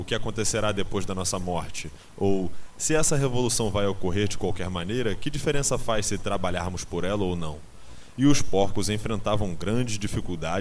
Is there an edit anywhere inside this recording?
no; 0 cuts

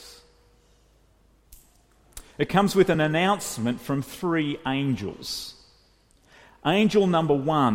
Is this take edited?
no; 0 cuts

